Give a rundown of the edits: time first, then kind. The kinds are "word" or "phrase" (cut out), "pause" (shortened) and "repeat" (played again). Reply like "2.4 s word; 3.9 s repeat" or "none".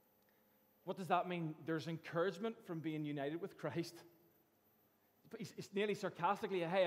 none